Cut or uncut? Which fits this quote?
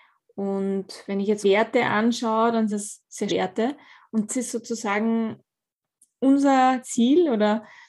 cut